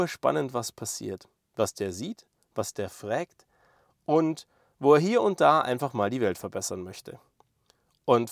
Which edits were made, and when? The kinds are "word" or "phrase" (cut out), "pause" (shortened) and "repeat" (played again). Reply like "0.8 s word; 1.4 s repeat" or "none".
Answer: none

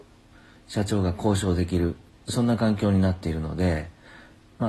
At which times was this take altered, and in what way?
none

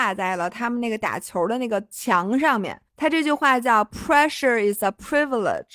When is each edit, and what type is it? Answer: 2.9 s pause

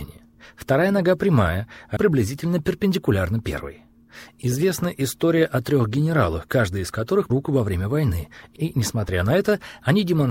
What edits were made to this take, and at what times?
2.0 s phrase; 7.3 s word

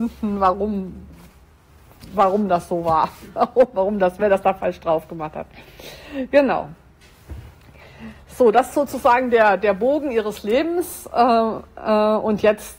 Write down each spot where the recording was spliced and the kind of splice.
none

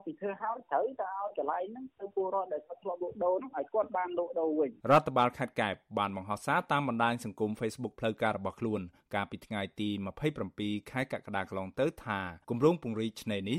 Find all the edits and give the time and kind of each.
4.8 s pause; 12.4 s pause

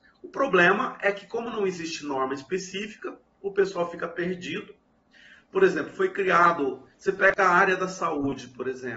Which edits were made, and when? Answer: 6.9 s pause

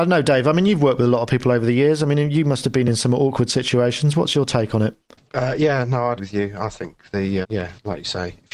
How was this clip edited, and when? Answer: 6.2 s word; 7.4 s word

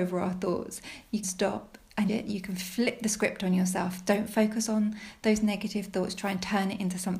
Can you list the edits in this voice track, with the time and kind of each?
1.2 s word; 2.1 s phrase

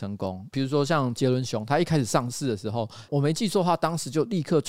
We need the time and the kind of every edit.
none

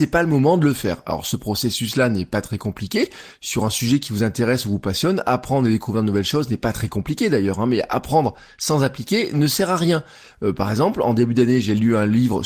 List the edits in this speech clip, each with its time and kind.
none

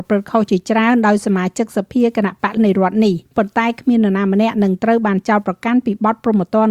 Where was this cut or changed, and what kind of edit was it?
2.6 s word; 3.3 s pause

